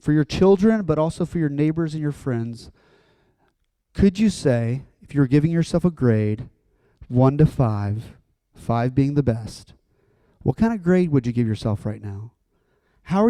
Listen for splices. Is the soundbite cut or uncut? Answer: uncut